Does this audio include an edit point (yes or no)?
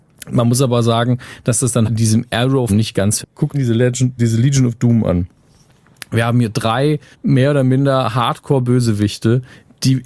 yes